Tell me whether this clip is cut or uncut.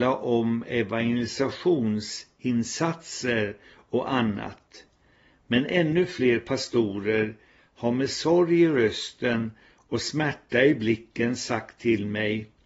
uncut